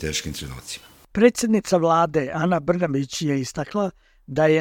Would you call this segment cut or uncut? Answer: uncut